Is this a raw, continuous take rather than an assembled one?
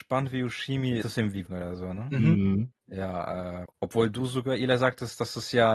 no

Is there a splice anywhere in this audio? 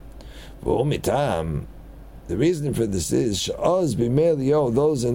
no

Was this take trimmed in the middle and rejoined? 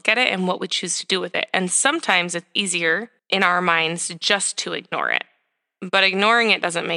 yes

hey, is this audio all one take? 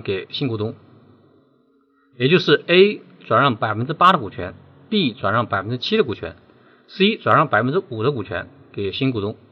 yes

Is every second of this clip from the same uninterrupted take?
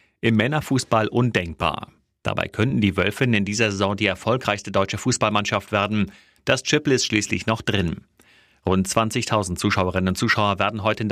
yes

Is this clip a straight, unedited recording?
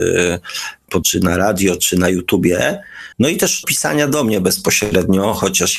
no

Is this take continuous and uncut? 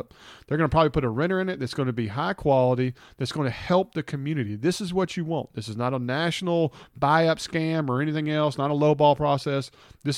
yes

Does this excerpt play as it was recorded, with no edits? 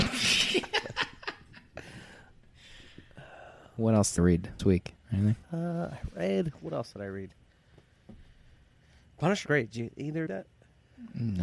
no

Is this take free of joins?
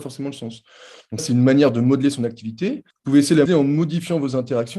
no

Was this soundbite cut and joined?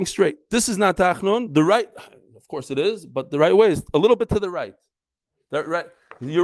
no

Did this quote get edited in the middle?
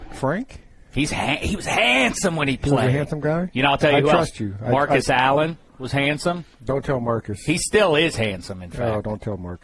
yes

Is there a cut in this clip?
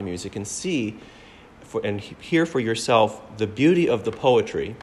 no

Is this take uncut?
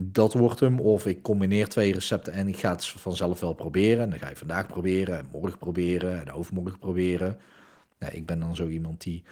yes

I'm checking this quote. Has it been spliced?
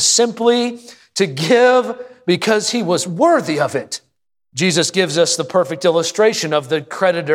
no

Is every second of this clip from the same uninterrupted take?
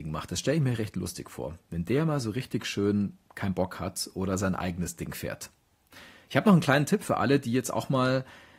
yes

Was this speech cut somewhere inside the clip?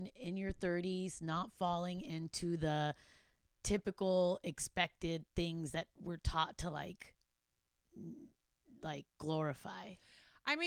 no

